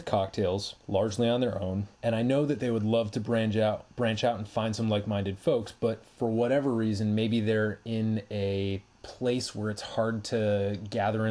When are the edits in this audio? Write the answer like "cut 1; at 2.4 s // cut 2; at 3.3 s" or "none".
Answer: cut 1; at 1.9 s // cut 2; at 8.9 s